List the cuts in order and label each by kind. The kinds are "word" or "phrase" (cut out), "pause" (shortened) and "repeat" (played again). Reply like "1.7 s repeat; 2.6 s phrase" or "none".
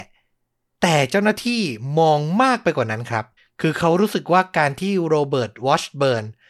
3.4 s pause